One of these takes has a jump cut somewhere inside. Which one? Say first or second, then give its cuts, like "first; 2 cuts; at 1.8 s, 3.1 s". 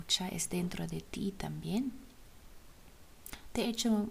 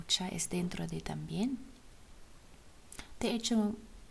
second; 1 cut; at 1.0 s